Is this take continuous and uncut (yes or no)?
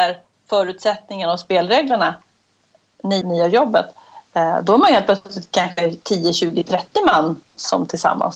no